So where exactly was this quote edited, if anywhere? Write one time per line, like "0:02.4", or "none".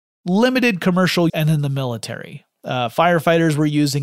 0:01.3

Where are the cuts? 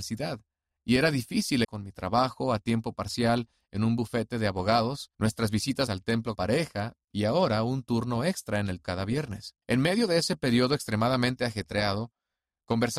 0:01.6
0:05.1
0:05.9
0:06.3
0:08.8
0:09.6

